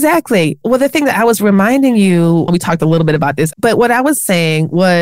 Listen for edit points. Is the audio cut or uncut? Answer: cut